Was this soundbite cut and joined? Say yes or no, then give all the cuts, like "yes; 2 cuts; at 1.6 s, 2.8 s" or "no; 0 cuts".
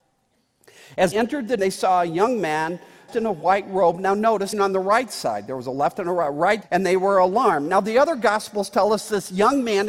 yes; 5 cuts; at 1.1 s, 1.6 s, 3.1 s, 4.5 s, 6.6 s